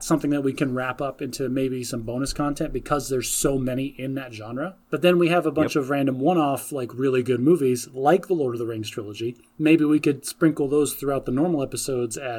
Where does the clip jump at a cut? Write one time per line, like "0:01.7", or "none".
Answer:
0:04.8

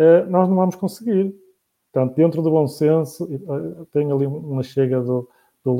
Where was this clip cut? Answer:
none

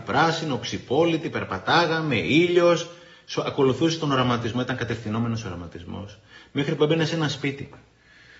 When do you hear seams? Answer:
none

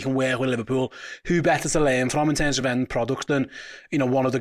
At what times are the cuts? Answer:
none

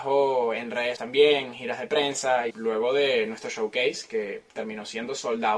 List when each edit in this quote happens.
0:01.0
0:02.5

